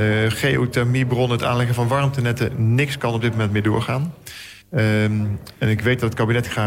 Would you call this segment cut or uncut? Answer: cut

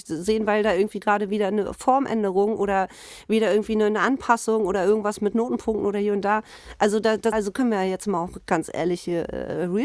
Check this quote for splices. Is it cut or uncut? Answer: cut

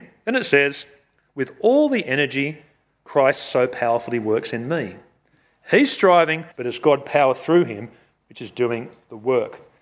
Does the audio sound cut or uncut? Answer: cut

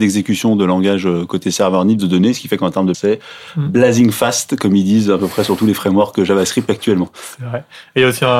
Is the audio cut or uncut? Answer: cut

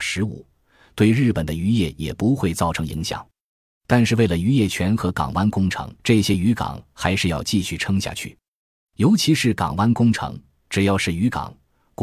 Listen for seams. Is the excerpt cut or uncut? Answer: cut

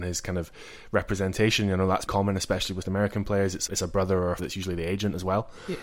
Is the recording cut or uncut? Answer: cut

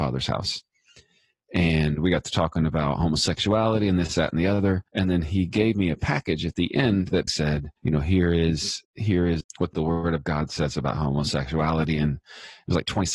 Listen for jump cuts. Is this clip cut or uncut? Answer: cut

